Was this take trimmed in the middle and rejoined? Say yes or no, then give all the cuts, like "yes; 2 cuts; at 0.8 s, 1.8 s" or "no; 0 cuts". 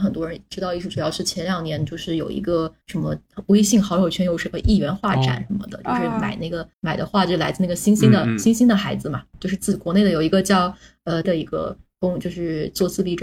yes; 3 cuts; at 2.8 s, 6.7 s, 11.2 s